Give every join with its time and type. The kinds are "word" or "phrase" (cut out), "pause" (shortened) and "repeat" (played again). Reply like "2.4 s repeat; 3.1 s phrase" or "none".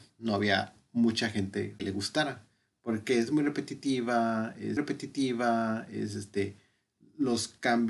1.8 s word; 4.8 s repeat